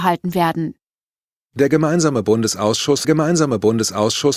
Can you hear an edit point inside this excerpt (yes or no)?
yes